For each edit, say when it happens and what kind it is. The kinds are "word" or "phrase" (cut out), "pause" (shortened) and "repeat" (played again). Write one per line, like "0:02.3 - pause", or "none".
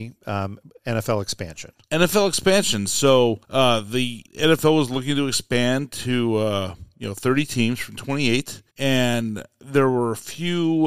0:03.4 - pause
0:04.3 - pause
0:08.7 - pause